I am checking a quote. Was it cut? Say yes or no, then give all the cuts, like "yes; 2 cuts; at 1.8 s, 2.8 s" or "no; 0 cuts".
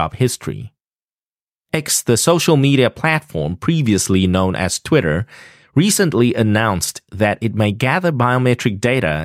no; 0 cuts